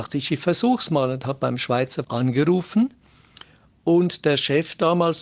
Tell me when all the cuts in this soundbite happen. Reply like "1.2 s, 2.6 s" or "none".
2.0 s